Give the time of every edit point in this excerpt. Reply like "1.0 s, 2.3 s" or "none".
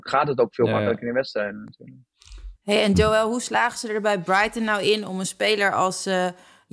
2.6 s